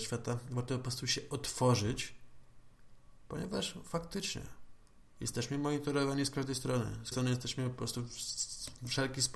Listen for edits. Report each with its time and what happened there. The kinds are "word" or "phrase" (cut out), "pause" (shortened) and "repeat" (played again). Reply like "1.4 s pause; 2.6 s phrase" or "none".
7.1 s word